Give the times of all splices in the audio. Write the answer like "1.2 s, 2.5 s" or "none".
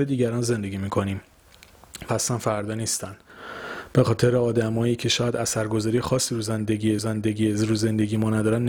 2.1 s, 7.0 s